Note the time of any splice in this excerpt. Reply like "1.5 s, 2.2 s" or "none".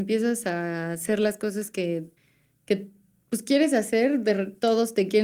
2.2 s

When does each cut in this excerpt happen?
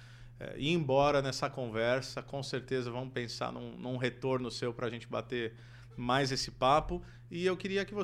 none

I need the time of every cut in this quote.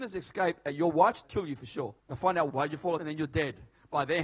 1.2 s, 2.0 s, 2.5 s, 3.0 s

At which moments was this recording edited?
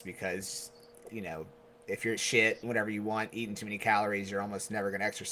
2.2 s, 2.6 s

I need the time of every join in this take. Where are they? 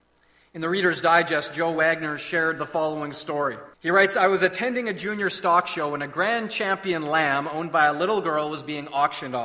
3.7 s

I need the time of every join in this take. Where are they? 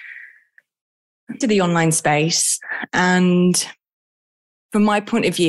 1.4 s

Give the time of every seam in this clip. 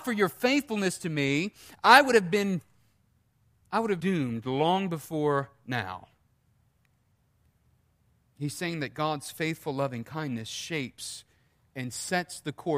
4.0 s

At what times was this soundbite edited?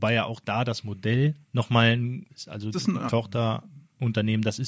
1.4 s, 2.3 s, 2.7 s, 3.1 s

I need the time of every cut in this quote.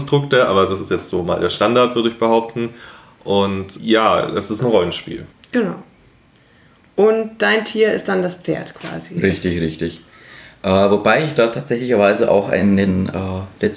3.8 s, 5.3 s

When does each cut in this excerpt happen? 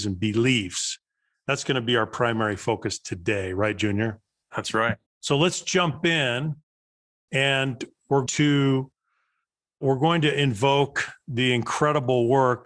5.1 s, 8.3 s

